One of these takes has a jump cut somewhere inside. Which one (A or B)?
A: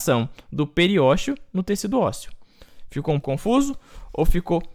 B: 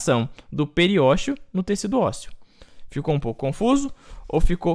A